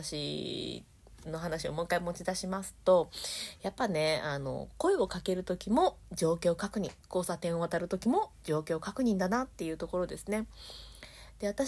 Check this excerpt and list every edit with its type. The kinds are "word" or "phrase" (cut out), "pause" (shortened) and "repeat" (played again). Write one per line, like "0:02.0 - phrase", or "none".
0:07.0 - pause

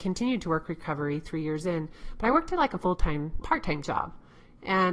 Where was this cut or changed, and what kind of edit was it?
0:03.4 - word

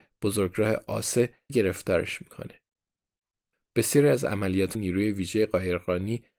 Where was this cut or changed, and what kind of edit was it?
0:01.5 - word
0:04.7 - word

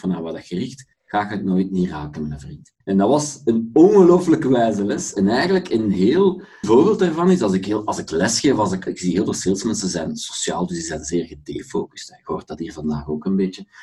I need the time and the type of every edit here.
0:00.9 - pause
0:02.8 - pause
0:06.6 - word
0:08.9 - word

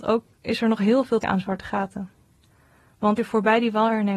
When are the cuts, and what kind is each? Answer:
0:01.2 - word
0:03.2 - word

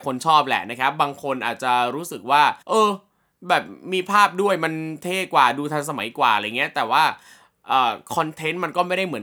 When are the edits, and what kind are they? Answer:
0:02.6 - pause

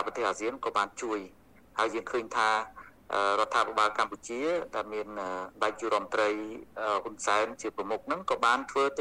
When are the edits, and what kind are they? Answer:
0:05.5 - pause

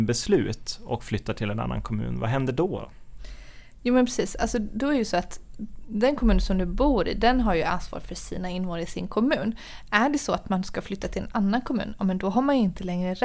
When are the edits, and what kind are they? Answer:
none

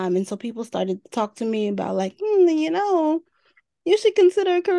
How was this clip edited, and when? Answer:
none

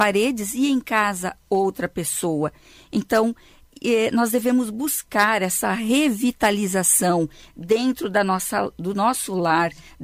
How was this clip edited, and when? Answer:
none

